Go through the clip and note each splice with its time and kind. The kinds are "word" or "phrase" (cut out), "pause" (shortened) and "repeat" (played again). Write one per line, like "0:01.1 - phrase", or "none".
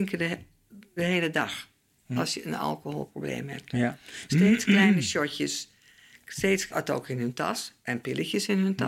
0:01.0 - word
0:06.7 - word